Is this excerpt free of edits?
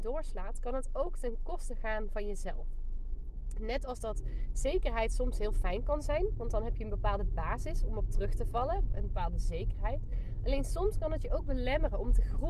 yes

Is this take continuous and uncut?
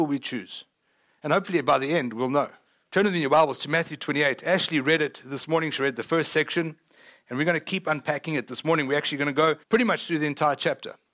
no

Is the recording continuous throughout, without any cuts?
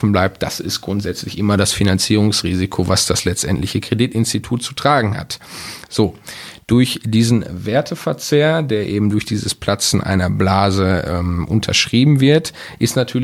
yes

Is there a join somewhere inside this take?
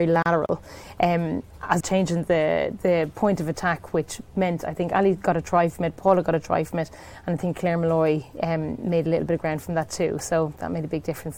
yes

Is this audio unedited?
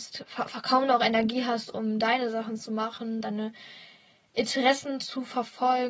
yes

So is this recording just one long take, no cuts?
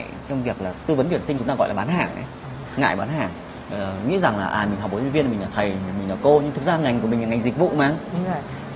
no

